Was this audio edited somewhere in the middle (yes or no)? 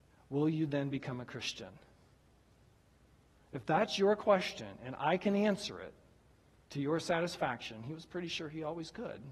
no